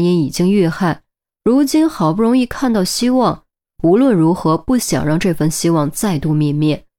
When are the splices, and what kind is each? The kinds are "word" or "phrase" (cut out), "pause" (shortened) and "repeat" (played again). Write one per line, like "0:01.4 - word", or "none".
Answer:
none